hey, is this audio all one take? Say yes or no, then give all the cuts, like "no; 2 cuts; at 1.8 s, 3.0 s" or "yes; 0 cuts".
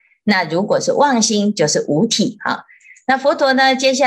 yes; 0 cuts